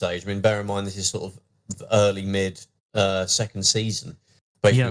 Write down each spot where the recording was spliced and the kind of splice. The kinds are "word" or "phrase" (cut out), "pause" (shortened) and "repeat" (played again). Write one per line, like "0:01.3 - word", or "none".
none